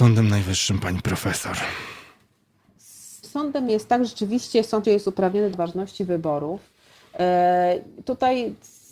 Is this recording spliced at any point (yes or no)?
yes